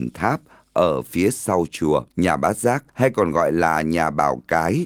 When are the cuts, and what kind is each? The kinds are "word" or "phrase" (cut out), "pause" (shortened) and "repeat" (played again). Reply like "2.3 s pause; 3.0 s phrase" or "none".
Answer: 2.1 s pause; 2.9 s pause